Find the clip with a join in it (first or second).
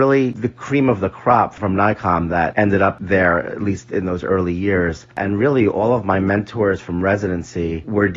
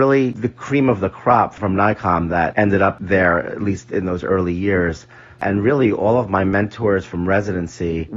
first